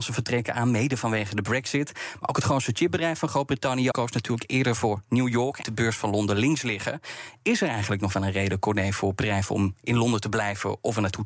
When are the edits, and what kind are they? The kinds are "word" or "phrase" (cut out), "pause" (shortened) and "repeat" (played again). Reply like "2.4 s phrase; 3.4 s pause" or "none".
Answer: 3.9 s word; 5.6 s word